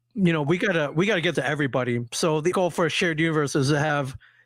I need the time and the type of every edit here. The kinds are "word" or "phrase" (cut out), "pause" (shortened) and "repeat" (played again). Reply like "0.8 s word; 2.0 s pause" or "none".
1.3 s word; 2.5 s word